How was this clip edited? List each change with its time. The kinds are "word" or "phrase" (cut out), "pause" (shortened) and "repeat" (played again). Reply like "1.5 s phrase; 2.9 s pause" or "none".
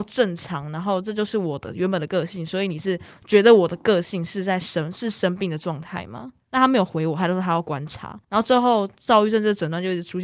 6.4 s pause; 8.2 s pause